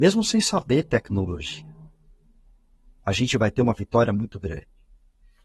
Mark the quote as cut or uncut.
uncut